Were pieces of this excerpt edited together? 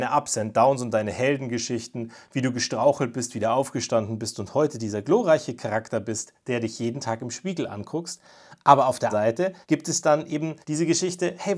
yes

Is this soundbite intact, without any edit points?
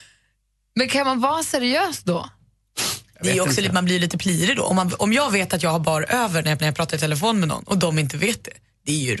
no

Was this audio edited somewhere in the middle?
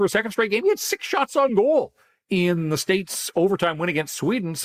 no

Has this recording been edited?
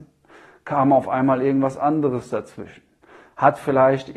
no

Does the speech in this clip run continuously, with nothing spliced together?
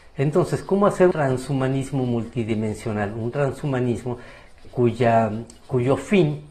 no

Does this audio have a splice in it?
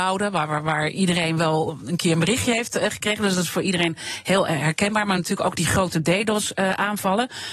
no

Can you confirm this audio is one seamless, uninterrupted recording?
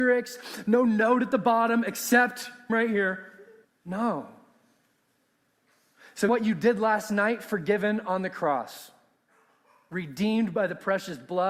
no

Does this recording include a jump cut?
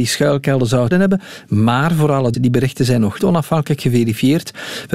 yes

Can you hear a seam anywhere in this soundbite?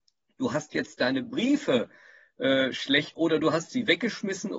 yes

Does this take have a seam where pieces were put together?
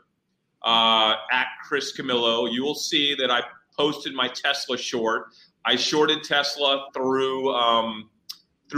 no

